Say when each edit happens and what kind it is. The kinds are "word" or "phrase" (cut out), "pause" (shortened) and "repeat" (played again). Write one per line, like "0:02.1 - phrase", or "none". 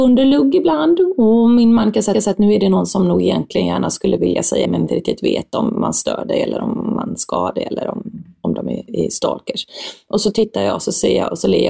0:02.1 - repeat
0:04.6 - phrase
0:08.9 - word